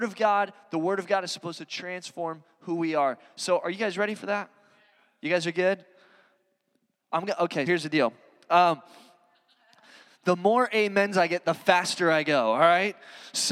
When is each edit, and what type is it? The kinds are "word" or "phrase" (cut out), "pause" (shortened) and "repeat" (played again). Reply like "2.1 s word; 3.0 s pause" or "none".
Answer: 7.7 s word